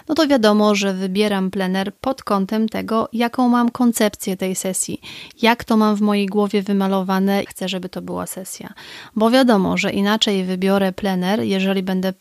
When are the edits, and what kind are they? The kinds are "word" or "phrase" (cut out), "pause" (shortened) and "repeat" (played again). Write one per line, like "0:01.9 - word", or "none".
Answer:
0:07.5 - word